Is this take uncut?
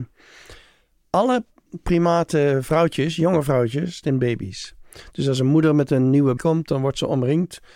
no; 2 cuts; at 4.0 s, 6.4 s

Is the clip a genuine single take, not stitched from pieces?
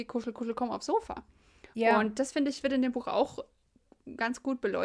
yes; 0 cuts

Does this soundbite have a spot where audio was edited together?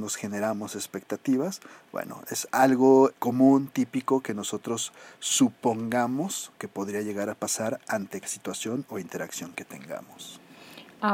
yes; 3 cuts; at 3.1 s, 6.5 s, 8.2 s

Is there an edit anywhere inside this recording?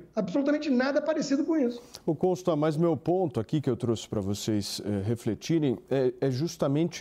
no; 0 cuts

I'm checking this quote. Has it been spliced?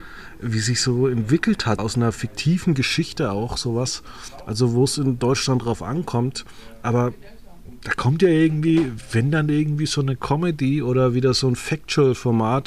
yes; 1 cut; at 1.8 s

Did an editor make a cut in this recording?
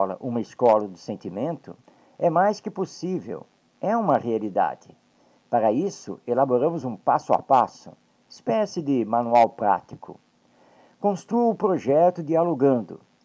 no; 0 cuts

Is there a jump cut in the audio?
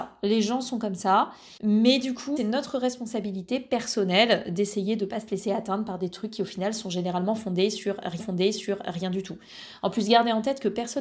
yes; 3 cuts; at 1.6 s, 2.4 s, 8.2 s

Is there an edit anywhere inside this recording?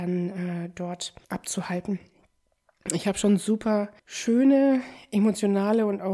yes; 2 cuts; at 1.2 s, 4.0 s

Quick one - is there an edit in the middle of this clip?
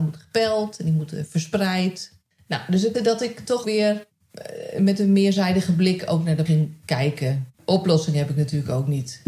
yes; 4 cuts; at 2.9 s, 3.6 s, 6.5 s, 7.5 s

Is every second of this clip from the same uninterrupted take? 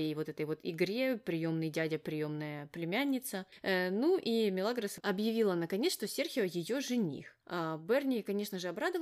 no; 1 cut; at 7.4 s

